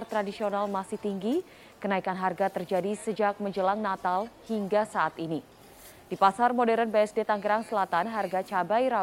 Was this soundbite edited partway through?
no; 0 cuts

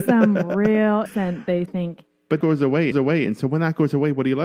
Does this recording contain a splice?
yes; 4 cuts; at 1.1 s, 1.7 s, 2.4 s, 2.9 s

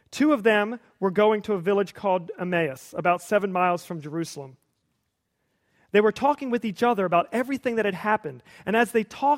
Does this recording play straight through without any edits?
yes; 0 cuts

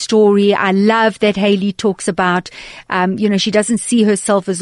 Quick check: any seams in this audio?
no; 0 cuts

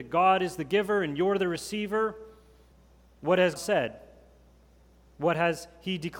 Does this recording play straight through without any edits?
no; 2 cuts; at 2.7 s, 3.6 s

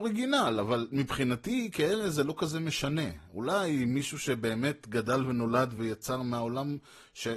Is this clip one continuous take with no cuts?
yes; 0 cuts

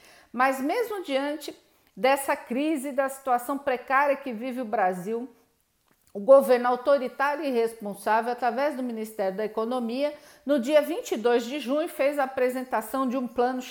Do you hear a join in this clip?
no; 0 cuts

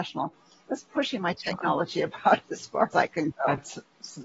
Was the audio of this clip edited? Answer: yes; 1 cut; at 2.9 s

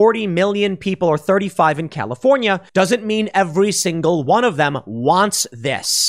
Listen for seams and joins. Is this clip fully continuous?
no; 1 cut; at 2.7 s

